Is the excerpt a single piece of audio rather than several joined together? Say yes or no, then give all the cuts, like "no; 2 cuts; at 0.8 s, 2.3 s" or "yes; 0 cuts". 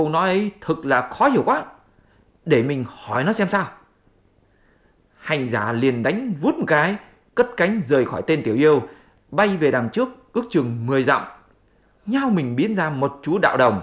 yes; 0 cuts